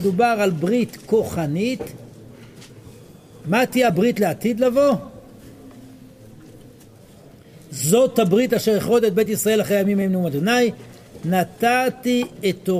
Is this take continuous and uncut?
yes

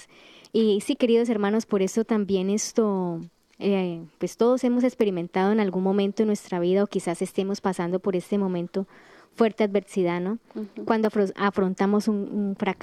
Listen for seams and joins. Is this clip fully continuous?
yes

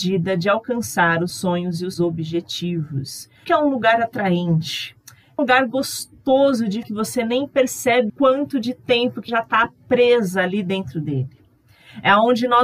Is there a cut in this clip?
yes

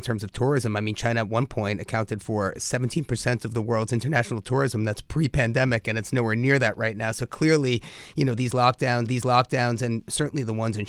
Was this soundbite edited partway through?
yes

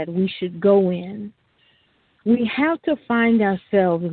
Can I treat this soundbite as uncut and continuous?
yes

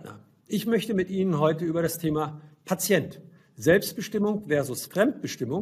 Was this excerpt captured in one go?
yes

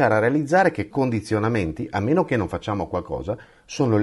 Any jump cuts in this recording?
yes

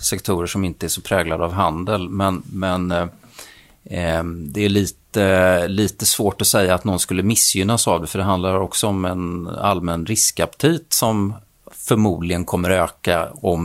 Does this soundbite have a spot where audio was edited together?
no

